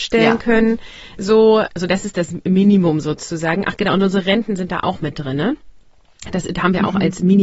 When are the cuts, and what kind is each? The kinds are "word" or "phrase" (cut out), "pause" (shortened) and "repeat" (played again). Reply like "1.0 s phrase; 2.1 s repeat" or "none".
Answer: 1.7 s word